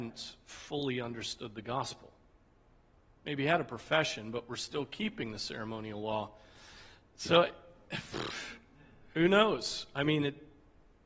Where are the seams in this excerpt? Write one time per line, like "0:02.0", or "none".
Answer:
none